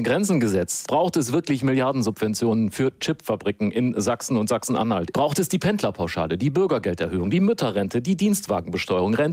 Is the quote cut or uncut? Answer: uncut